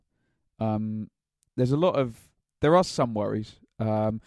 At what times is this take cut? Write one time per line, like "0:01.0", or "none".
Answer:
none